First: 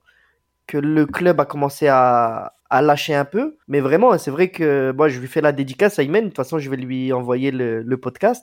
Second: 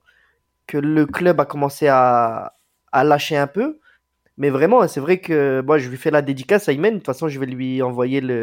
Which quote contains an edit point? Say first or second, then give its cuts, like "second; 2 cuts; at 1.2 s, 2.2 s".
first; 2 cuts; at 2.6 s, 3.6 s